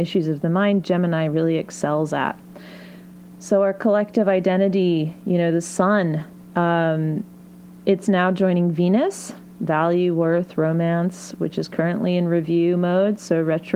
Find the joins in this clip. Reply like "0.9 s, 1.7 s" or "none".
none